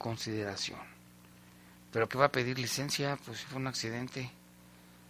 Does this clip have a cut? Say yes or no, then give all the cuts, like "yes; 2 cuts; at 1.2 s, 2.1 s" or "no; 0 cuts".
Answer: yes; 1 cut; at 2.1 s